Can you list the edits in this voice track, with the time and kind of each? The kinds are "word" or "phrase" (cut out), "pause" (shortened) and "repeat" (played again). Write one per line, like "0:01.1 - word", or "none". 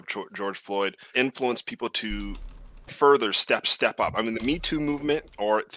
0:01.1 - word
0:02.9 - word
0:03.6 - repeat

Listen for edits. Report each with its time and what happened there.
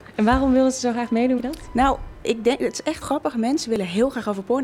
0:01.4 - word
0:03.0 - word

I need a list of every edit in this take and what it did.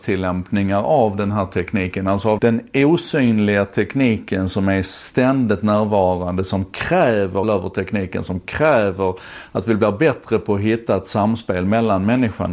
0:02.4 - word
0:07.4 - phrase

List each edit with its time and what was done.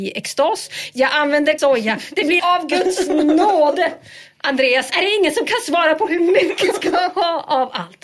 0:01.6 - word
0:02.4 - phrase
0:04.9 - word
0:06.7 - word

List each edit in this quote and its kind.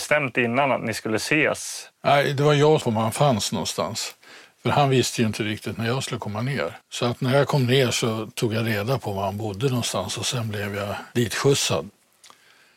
0:02.8 - phrase
0:06.8 - pause

